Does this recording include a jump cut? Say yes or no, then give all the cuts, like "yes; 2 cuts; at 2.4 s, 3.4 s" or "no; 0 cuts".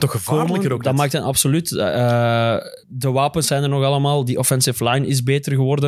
yes; 1 cut; at 2.8 s